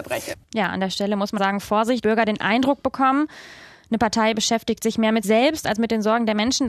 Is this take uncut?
no; 3 cuts; at 1.4 s, 2.0 s, 5.2 s

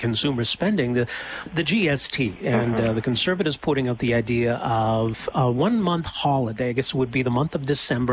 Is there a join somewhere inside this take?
yes; 2 cuts; at 1.5 s, 5.3 s

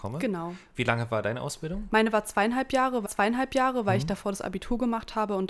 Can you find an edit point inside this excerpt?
yes; 1 cut; at 3.0 s

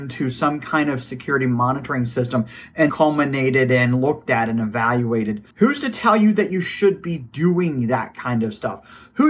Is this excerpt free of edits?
no; 2 cuts; at 2.9 s, 5.5 s

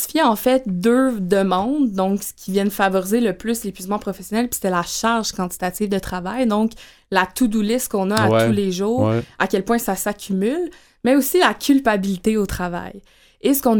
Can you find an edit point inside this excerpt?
no; 0 cuts

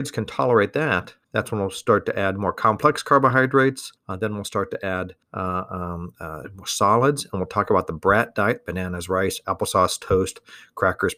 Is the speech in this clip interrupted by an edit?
yes; 3 cuts; at 1.2 s, 4.0 s, 5.2 s

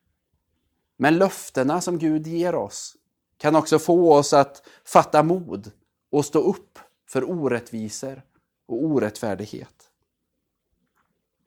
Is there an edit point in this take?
no; 0 cuts

